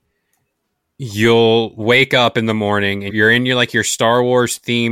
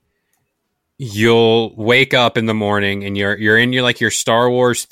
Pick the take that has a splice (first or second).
first